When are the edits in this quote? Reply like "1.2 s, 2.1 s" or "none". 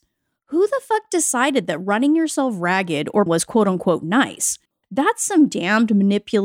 3.3 s